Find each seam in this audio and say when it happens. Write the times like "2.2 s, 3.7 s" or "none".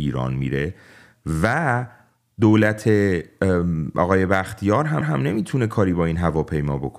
5.0 s